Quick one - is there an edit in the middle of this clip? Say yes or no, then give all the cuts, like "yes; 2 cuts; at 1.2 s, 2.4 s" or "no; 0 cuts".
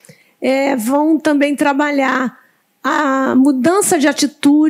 no; 0 cuts